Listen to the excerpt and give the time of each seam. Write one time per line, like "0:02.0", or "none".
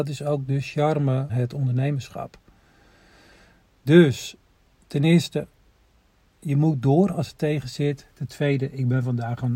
0:01.3